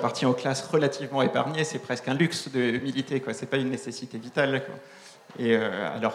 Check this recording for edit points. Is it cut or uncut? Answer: uncut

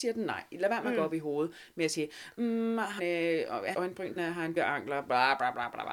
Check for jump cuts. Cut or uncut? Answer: cut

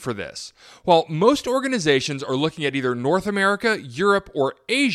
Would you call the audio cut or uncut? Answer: uncut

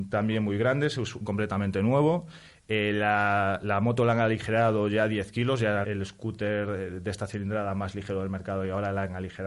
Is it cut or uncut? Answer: cut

